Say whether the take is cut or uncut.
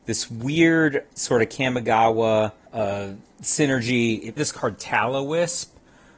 cut